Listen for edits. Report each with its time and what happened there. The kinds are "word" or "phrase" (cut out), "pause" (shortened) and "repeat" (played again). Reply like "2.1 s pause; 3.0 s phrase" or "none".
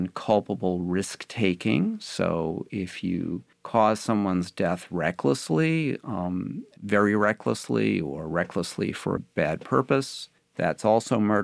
3.5 s pause; 6.8 s word; 9.2 s phrase; 10.4 s pause